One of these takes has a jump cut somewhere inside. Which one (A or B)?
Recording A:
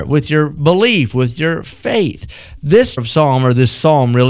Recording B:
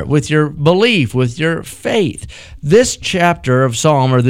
A